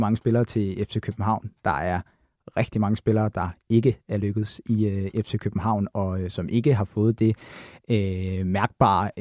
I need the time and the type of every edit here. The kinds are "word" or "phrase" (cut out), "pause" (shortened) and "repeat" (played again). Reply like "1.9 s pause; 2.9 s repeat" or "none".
none